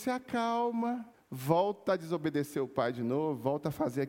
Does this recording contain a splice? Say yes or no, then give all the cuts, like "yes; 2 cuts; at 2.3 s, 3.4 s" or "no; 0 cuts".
yes; 1 cut; at 1.1 s